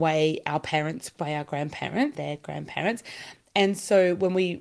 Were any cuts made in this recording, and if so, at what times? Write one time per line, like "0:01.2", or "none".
0:01.2
0:02.1